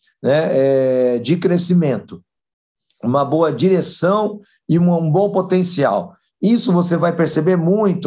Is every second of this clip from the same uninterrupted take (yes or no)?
yes